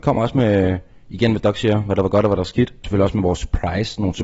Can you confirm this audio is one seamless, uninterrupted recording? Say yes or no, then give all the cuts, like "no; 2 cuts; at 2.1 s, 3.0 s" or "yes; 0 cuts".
no; 1 cut; at 2.8 s